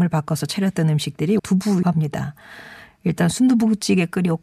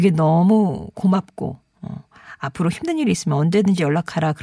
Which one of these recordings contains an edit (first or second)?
first